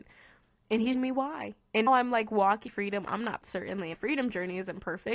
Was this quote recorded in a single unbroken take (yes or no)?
no